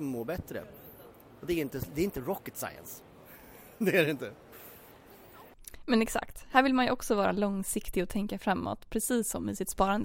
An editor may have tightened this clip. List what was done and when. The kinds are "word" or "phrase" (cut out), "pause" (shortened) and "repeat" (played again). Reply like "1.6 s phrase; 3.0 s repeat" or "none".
none